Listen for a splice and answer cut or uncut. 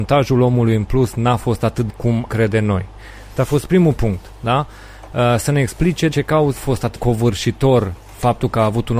cut